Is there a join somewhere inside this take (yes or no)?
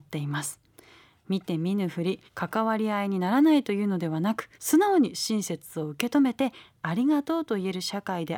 yes